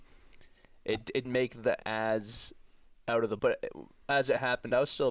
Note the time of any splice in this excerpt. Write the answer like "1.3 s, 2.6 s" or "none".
1.2 s, 1.8 s, 3.4 s